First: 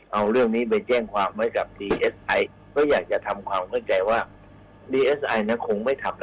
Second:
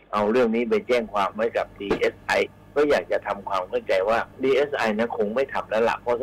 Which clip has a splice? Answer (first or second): second